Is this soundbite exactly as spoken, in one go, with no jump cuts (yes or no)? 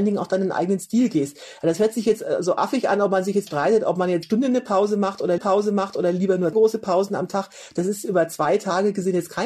no